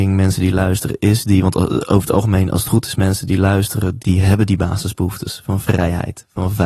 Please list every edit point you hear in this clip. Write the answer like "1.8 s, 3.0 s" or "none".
4.0 s